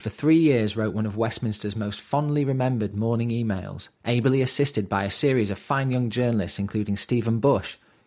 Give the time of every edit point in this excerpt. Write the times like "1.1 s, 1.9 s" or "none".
3.9 s